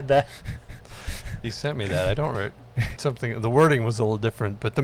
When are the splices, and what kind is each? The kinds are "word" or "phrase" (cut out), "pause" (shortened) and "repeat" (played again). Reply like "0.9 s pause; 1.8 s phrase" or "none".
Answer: 2.3 s word; 3.0 s phrase